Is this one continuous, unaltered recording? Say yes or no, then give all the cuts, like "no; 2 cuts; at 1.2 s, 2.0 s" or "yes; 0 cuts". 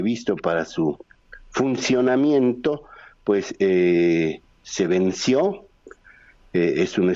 yes; 0 cuts